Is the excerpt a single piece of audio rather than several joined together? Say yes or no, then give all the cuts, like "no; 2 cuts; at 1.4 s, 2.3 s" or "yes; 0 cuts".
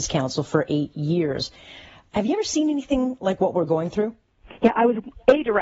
yes; 0 cuts